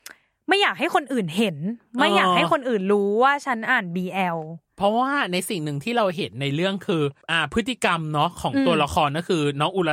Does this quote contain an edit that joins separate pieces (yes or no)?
yes